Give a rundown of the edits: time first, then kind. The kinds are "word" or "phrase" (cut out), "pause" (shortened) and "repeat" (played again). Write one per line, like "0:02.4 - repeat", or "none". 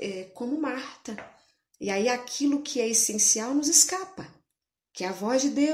none

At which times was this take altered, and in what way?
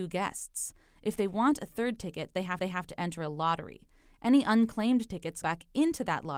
0:02.6 - repeat
0:05.4 - word

